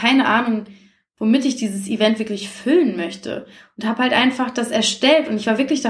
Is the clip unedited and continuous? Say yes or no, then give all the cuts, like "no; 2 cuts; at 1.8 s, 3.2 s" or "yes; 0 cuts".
yes; 0 cuts